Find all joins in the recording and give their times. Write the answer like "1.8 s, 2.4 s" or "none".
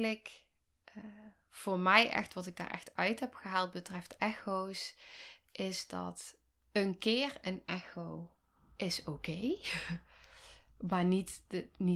none